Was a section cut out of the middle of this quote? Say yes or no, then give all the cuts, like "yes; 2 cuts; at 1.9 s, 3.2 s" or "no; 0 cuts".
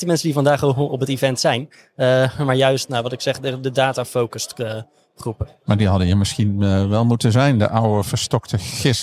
no; 0 cuts